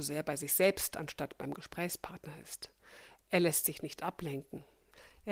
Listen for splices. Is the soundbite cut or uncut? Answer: uncut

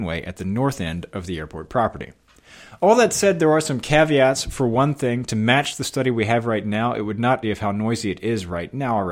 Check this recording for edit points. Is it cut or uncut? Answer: cut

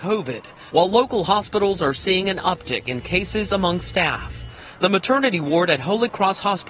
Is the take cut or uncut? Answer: uncut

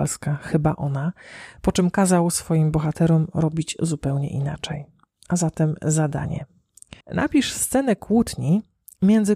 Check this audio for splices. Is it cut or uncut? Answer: cut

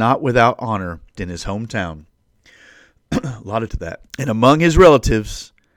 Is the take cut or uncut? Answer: cut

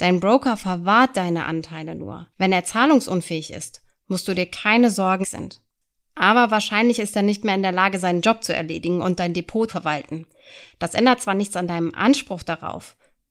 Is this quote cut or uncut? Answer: cut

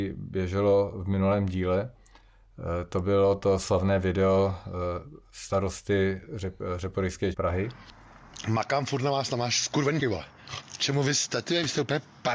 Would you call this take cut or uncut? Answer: cut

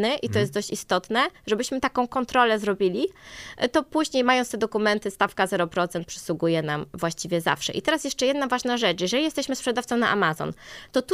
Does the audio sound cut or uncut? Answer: uncut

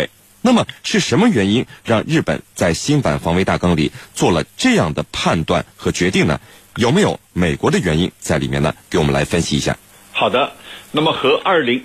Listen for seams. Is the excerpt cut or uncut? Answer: uncut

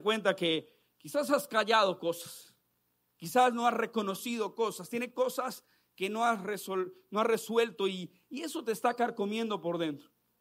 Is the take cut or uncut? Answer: uncut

